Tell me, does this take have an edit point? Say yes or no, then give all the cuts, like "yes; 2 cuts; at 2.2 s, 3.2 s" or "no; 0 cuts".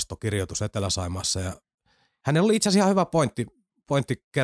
no; 0 cuts